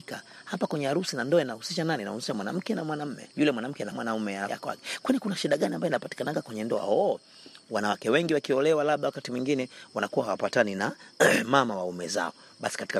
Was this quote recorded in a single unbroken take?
no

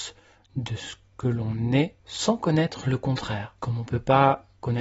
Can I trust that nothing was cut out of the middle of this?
no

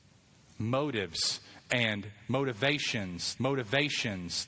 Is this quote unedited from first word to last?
no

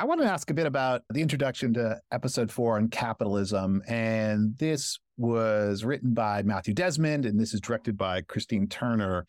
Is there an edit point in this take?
no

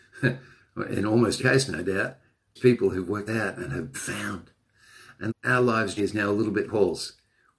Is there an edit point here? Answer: yes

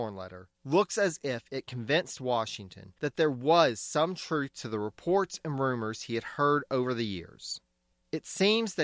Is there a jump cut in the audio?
no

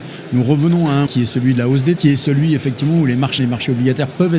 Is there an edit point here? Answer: yes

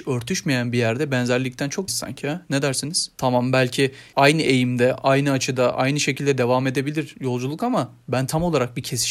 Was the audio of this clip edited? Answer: yes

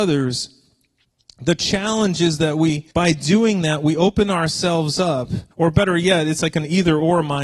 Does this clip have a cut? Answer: yes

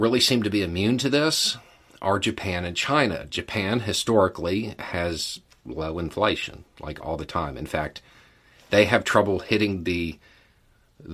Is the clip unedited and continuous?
yes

